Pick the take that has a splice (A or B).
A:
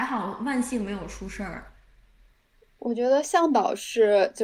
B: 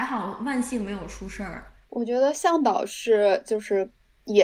B